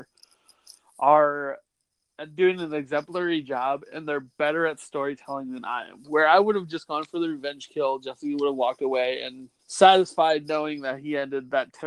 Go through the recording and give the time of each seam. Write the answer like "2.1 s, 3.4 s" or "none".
9.6 s